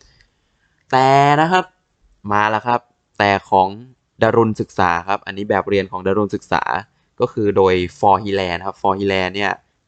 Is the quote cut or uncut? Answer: uncut